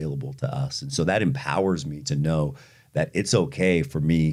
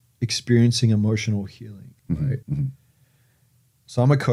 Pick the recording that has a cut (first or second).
second